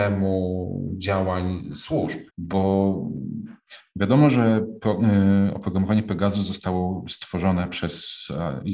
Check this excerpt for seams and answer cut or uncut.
cut